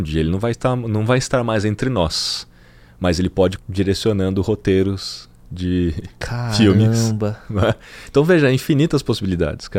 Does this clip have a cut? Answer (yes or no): yes